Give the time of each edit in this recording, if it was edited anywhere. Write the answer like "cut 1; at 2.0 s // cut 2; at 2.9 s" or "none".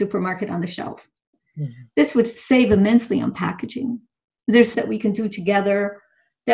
cut 1; at 4.7 s